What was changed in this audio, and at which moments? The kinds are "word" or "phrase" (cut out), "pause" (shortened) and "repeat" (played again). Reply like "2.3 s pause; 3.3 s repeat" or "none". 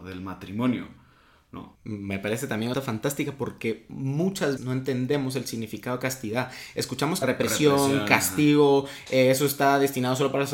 1.7 s pause; 2.7 s phrase; 4.6 s word; 7.2 s phrase